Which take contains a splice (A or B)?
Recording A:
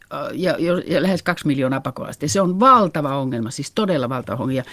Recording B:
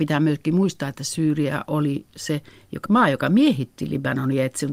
B